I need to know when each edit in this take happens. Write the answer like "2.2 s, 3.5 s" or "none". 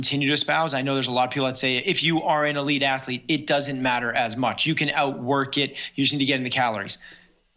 none